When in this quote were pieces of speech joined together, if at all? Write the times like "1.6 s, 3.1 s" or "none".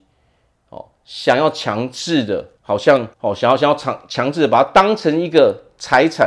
2.6 s, 3.1 s